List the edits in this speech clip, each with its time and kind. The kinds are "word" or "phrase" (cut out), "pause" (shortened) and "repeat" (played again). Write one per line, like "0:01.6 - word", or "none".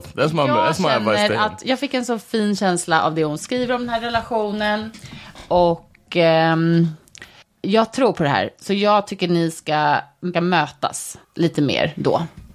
0:07.4 - pause
0:10.3 - word
0:11.2 - pause

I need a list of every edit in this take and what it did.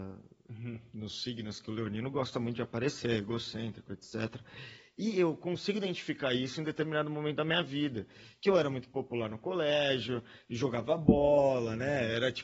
none

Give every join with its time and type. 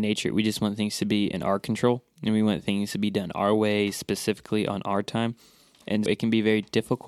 0:06.1 - word

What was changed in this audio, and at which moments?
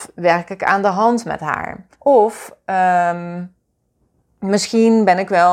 0:01.9 - pause

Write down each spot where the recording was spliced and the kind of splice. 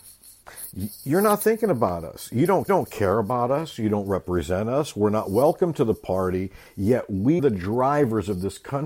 0:02.7 - repeat
0:07.4 - word

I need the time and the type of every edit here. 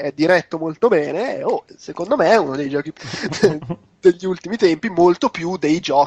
0:03.0 - word

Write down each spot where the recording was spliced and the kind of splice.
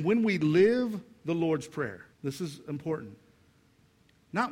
0:02.1 - pause

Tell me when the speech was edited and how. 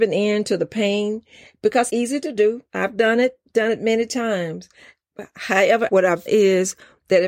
0:01.9 - word
0:02.7 - pause
0:05.9 - word
0:06.3 - word

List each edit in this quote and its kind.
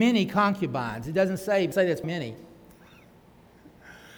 0:01.7 - word
0:02.0 - word

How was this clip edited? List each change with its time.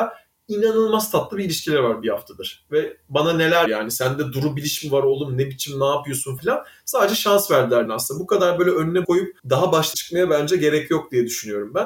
0:03.7 - word
0:06.4 - word
0:07.9 - word
0:09.0 - word
0:09.4 - pause
0:09.9 - word

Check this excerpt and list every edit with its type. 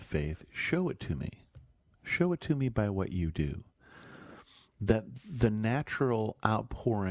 none

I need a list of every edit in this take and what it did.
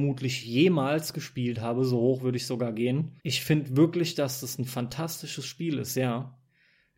0:03.2 - pause

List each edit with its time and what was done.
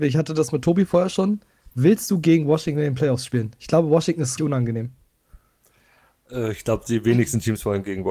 0:04.4 - word

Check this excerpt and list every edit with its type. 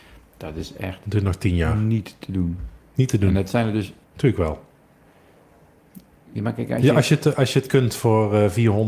0:02.8 - pause
0:04.0 - pause
0:06.2 - pause

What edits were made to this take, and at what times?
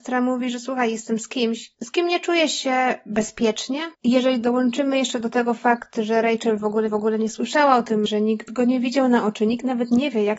0:03.9 - pause
0:06.9 - repeat
0:08.1 - word

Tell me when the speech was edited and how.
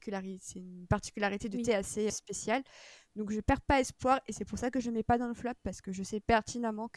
0:02.1 - word

